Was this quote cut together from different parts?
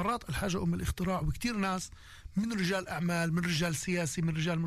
no; 0 cuts

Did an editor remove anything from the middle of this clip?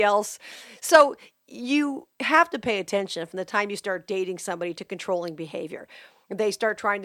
no; 0 cuts

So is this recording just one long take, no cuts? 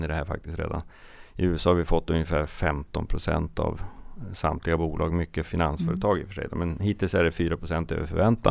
yes; 0 cuts

